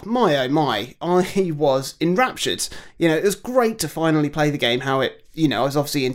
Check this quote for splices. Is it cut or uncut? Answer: uncut